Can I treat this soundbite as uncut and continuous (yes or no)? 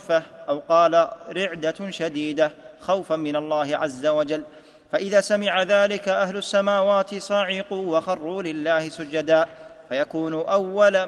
yes